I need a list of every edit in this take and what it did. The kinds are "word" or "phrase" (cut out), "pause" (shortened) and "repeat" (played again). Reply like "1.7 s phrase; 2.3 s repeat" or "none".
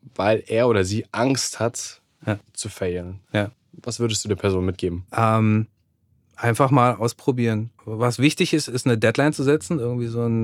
5.1 s pause; 7.8 s pause